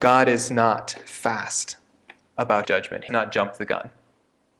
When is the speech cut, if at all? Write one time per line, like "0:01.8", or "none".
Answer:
0:02.6
0:03.1